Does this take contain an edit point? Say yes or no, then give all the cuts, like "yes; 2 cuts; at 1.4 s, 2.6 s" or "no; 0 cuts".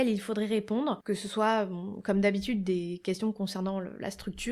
no; 0 cuts